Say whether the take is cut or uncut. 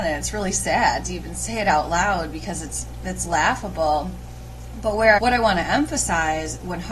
cut